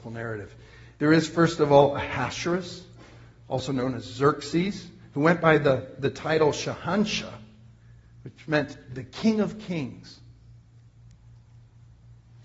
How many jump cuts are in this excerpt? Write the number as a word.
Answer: zero